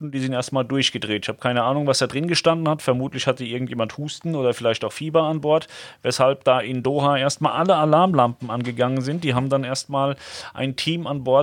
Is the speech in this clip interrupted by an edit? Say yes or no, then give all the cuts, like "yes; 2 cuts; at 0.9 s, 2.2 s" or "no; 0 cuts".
no; 0 cuts